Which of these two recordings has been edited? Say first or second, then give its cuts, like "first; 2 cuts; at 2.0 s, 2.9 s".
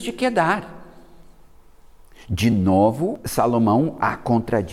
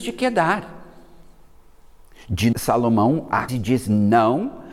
second; 2 cuts; at 2.5 s, 3.5 s